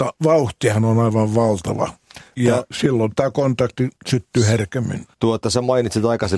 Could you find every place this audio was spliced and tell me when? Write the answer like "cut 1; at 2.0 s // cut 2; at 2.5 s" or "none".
cut 1; at 4.0 s // cut 2; at 5.1 s